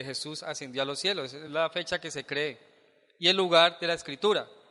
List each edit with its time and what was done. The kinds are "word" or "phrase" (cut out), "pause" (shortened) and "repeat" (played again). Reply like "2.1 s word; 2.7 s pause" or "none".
none